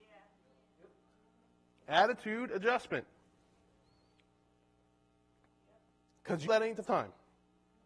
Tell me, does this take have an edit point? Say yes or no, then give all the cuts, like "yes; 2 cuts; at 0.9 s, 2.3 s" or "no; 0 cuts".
yes; 2 cuts; at 6.5 s, 6.8 s